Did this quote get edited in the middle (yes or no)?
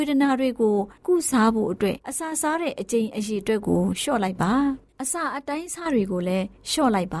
yes